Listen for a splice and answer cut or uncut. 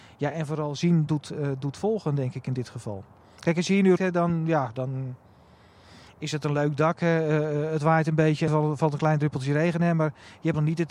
cut